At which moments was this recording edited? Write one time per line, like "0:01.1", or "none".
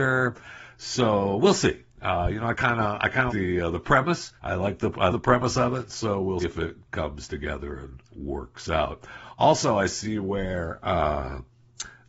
0:03.3
0:04.4
0:05.1
0:06.4
0:08.1